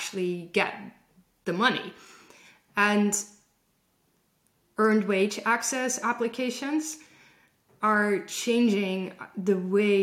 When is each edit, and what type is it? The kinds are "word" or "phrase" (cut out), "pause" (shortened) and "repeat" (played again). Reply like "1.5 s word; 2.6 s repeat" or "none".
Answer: none